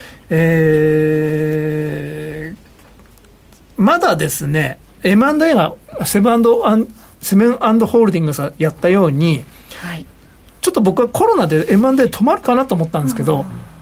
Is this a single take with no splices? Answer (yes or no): yes